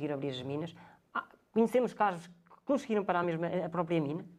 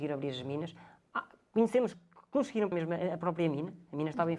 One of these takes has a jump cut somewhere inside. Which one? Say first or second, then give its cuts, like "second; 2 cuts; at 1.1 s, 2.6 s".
second; 2 cuts; at 1.9 s, 2.7 s